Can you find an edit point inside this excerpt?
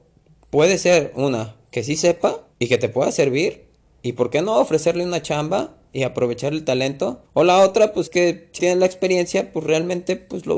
yes; 5 cuts; at 2.5 s, 3.8 s, 7.3 s, 8.1 s, 8.6 s

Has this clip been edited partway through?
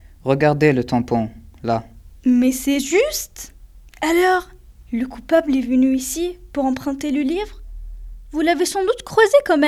no; 0 cuts

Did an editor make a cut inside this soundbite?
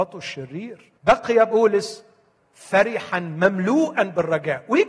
yes; 1 cut; at 1.0 s

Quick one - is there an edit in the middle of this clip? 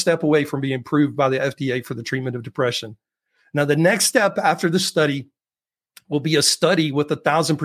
no; 0 cuts

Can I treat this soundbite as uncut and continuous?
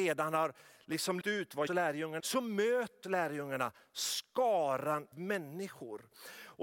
no; 5 cuts; at 1.2 s, 1.7 s, 2.2 s, 3.0 s, 5.1 s

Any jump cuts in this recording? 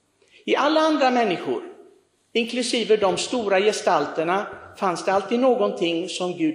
no; 0 cuts

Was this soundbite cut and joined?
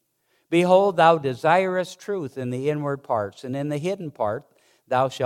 no; 0 cuts

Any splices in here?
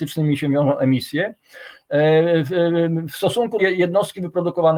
yes; 1 cut; at 3.6 s

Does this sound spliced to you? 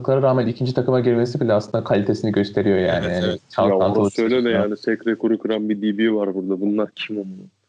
no; 0 cuts

